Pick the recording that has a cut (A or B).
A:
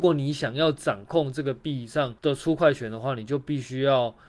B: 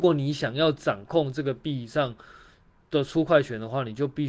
A